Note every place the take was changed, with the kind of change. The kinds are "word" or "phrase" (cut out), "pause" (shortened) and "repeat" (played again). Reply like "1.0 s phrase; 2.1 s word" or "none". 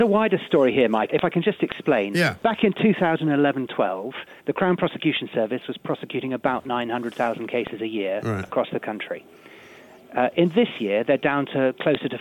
1.1 s phrase; 4.4 s pause